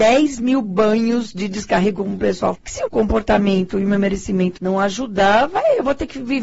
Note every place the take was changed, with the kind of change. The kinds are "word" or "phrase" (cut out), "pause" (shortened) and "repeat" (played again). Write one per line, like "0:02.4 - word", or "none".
0:02.5 - word
0:02.9 - word
0:04.6 - word